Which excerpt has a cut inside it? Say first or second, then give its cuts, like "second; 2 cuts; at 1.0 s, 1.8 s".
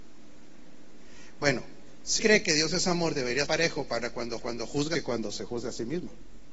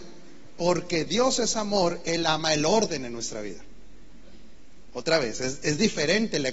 first; 4 cuts; at 2.2 s, 3.4 s, 4.4 s, 4.9 s